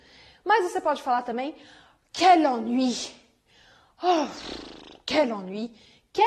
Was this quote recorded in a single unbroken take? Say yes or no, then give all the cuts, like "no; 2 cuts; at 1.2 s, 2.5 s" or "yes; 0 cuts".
yes; 0 cuts